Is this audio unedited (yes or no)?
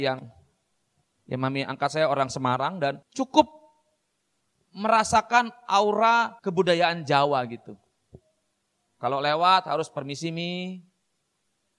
no